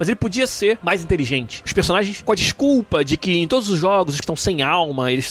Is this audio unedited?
no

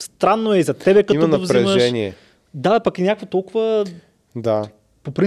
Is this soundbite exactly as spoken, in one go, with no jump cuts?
yes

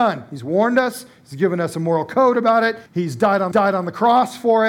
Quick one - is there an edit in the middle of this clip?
yes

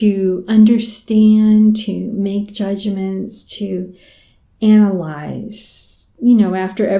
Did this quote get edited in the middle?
no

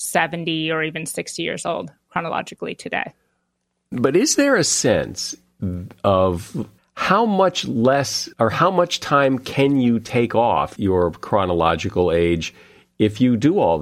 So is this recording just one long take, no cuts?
no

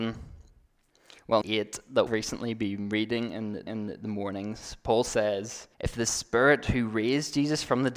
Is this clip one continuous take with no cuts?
no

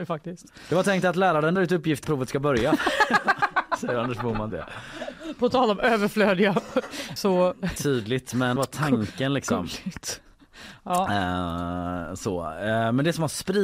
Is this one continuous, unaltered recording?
no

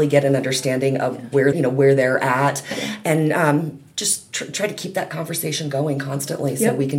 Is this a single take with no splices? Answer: no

